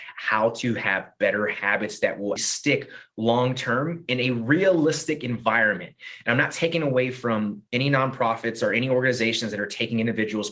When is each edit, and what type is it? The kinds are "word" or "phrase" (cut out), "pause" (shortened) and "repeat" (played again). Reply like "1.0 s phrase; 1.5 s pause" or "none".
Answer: 2.4 s word

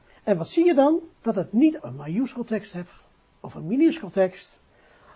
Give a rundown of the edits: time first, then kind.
1.1 s pause; 1.8 s phrase

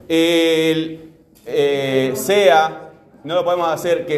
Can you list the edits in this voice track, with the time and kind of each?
none

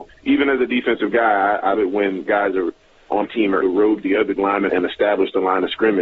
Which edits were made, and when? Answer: 1.7 s word; 2.3 s word; 3.2 s word; 3.6 s word; 4.0 s word; 4.4 s word; 4.7 s word

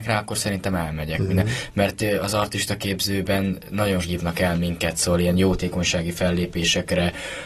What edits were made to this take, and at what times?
4.0 s word

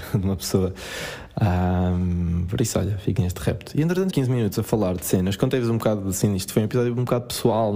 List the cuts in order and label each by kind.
3.2 s word; 4.1 s phrase

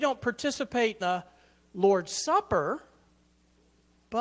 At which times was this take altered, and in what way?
1.0 s word

